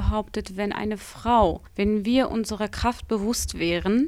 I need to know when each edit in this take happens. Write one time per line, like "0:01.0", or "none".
0:01.7